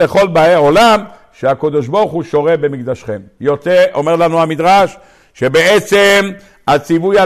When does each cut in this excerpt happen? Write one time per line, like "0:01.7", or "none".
none